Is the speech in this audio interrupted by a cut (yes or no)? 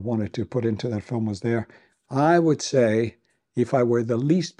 no